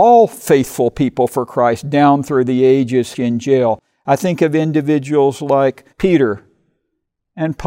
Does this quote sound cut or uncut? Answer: cut